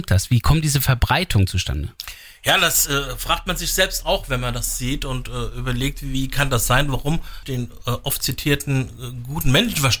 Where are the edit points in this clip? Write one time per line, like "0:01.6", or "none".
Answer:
0:07.4